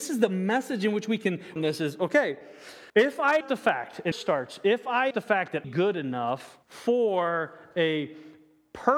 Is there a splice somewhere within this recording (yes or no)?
yes